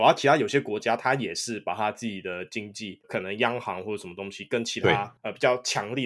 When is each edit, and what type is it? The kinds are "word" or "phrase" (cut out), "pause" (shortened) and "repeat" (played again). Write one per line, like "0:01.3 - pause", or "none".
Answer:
0:03.0 - word